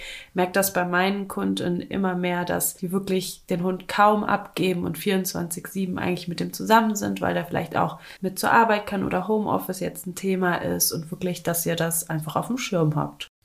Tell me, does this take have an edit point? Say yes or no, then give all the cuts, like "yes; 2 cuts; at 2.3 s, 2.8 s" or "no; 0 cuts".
yes; 1 cut; at 8.2 s